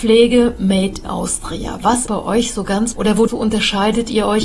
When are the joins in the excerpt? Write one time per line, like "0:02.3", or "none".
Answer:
0:01.0
0:02.1
0:02.9
0:03.3